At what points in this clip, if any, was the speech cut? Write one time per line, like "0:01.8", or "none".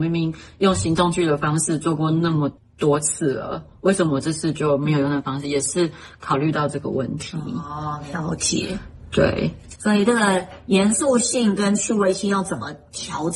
0:02.6
0:09.8